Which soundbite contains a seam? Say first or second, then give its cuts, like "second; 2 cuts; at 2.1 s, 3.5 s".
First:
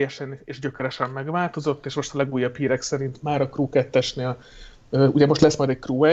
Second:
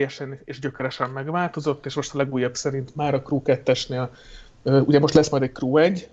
second; 1 cut; at 2.5 s